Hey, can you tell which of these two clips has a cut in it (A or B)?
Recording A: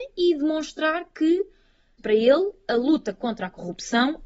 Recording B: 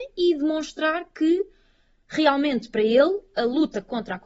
A